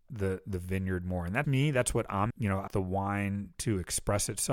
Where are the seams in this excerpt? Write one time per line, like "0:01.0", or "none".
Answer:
0:01.4
0:02.3
0:02.7